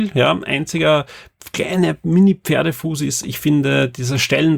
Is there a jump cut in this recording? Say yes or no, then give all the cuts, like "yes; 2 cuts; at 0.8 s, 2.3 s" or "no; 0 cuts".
no; 0 cuts